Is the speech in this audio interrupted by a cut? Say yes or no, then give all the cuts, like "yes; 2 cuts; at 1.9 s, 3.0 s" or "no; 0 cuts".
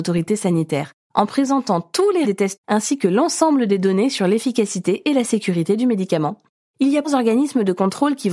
yes; 3 cuts; at 2.2 s, 2.6 s, 7.0 s